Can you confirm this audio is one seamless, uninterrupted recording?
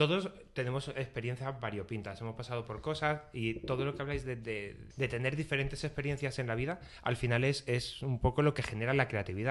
no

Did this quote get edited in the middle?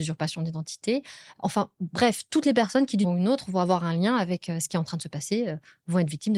yes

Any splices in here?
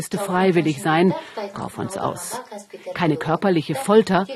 yes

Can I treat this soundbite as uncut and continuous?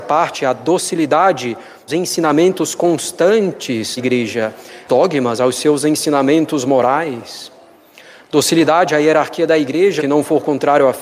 no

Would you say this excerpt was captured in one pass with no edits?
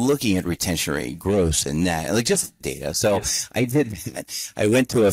no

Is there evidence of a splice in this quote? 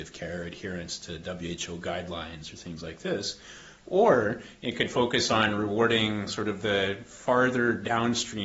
no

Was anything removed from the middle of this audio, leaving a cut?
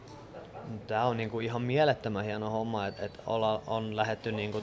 yes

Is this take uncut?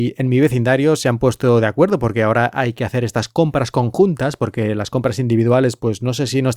yes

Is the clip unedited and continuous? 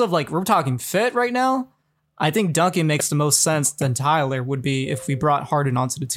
yes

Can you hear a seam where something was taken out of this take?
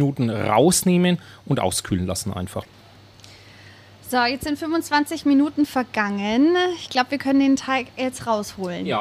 no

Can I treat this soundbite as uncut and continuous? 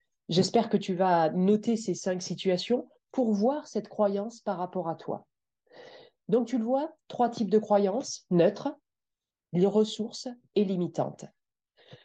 yes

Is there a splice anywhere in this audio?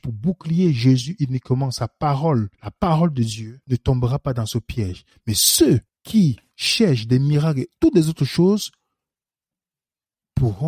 yes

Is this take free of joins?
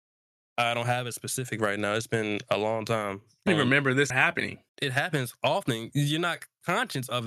no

